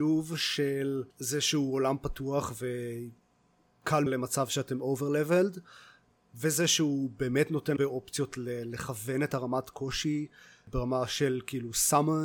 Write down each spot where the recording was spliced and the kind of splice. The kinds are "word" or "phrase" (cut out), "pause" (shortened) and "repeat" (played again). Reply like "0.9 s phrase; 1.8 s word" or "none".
1.1 s pause; 4.1 s phrase; 7.8 s word